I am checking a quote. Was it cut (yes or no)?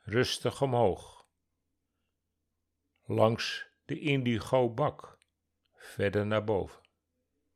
no